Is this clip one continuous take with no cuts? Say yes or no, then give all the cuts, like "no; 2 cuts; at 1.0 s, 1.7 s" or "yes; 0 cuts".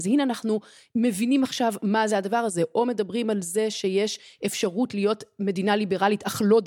yes; 0 cuts